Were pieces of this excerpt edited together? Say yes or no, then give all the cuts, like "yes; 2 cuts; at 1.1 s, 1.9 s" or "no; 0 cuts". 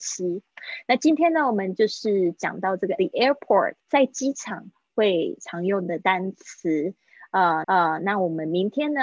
yes; 3 cuts; at 3.0 s, 3.8 s, 7.6 s